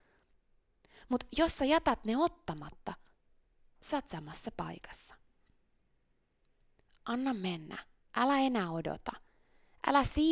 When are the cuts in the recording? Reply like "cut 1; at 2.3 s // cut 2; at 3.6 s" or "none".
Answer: none